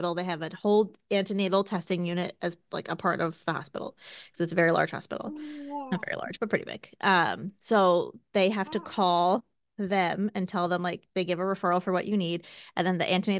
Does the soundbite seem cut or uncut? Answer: uncut